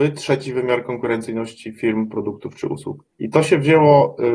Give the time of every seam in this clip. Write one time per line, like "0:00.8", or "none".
0:03.1

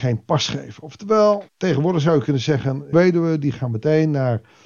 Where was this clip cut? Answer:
0:01.5
0:02.9

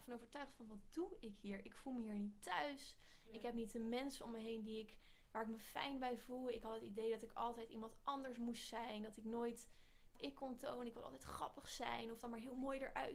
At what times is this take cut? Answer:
0:10.2

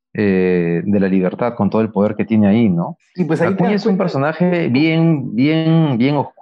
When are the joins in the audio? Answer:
none

